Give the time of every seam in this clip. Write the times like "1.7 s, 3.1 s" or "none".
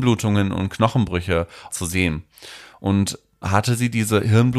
1.7 s, 3.4 s